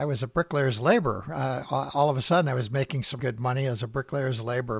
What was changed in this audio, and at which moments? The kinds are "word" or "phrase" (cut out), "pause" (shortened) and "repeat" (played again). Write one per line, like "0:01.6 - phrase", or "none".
0:03.2 - word